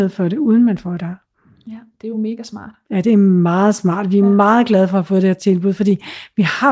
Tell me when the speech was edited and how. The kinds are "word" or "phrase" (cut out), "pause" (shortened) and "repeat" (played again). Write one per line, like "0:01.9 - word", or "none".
none